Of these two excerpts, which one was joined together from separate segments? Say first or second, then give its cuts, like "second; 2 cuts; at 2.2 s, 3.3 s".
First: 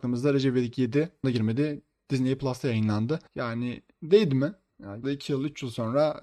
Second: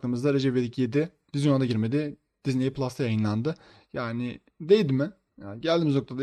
first; 3 cuts; at 1.2 s, 3.3 s, 5.0 s